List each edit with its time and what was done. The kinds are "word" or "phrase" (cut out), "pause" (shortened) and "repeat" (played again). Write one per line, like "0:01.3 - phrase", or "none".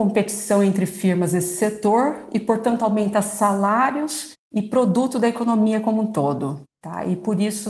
none